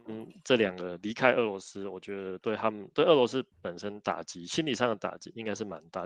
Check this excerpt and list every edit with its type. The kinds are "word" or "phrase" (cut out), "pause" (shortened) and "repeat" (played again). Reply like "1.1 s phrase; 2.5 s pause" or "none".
3.5 s pause